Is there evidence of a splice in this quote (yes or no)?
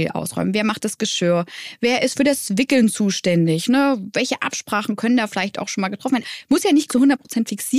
yes